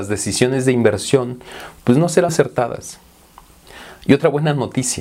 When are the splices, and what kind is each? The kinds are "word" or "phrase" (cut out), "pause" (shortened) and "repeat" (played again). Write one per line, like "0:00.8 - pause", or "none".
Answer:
0:02.3 - word

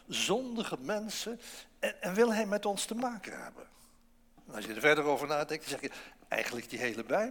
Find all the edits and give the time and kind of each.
none

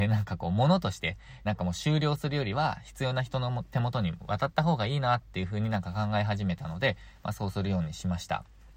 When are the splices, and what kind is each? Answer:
0:01.5 - phrase

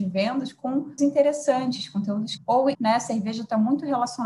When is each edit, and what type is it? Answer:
0:01.0 - word
0:02.4 - word
0:02.7 - word

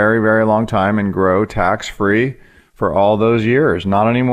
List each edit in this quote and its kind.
none

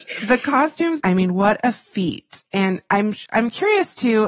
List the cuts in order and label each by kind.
0:01.0 - phrase

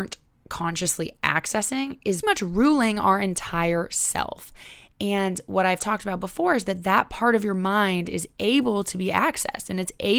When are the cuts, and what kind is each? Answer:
0:02.2 - word

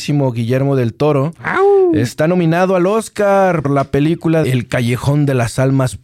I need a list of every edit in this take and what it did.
0:03.6 - word
0:04.4 - word

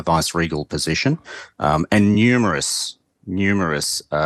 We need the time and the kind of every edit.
none

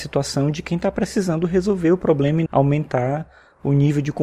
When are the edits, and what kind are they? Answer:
0:02.5 - word

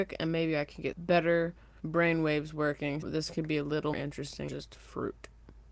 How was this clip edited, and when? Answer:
0:00.9 - word
0:01.8 - word
0:03.0 - word
0:03.9 - word
0:04.5 - word

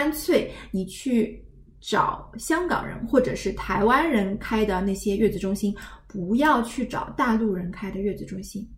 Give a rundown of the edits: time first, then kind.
none

